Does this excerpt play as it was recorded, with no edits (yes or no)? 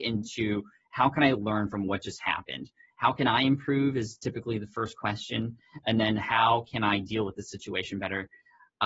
yes